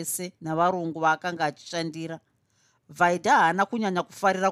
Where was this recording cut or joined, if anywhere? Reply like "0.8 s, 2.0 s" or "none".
none